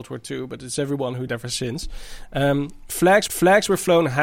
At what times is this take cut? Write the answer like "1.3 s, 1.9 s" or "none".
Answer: 1.3 s, 3.3 s

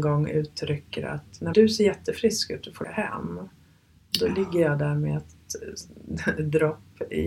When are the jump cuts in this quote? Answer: 1.5 s, 2.8 s

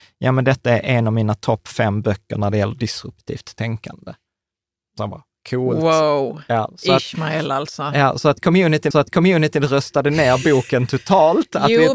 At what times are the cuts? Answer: 5.0 s, 8.9 s

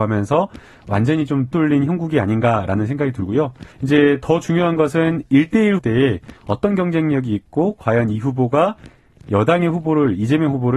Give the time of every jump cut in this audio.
1.5 s, 3.7 s, 5.8 s, 6.4 s

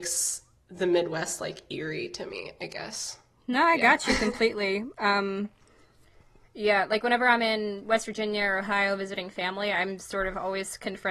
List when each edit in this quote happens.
none

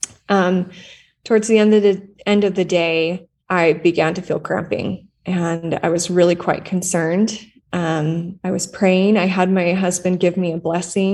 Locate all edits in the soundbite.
3.4 s, 5.2 s, 8.4 s

